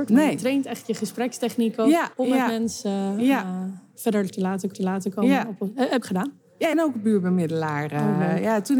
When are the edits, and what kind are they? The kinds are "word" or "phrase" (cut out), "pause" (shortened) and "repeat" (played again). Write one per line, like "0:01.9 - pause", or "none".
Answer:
0:02.1 - pause
0:04.7 - repeat
0:06.0 - phrase
0:06.7 - phrase